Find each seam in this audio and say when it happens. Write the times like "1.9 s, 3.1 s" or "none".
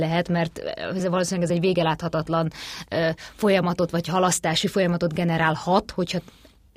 none